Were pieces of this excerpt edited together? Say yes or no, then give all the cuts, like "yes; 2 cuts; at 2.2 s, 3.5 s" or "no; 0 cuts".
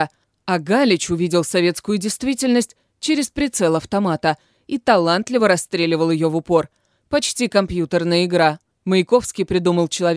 no; 0 cuts